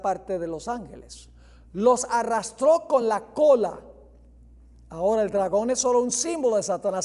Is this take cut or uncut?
uncut